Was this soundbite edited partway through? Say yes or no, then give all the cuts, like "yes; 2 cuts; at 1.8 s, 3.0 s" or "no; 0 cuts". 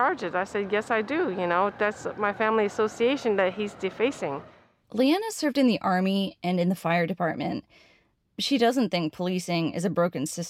no; 0 cuts